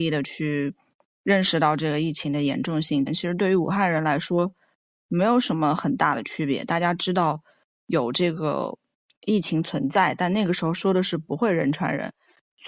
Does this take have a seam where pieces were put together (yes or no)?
yes